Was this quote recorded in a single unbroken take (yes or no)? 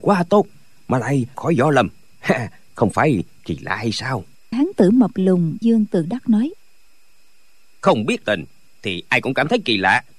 no